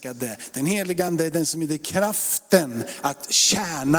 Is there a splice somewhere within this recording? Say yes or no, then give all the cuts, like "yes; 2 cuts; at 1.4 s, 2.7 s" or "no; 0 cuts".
no; 0 cuts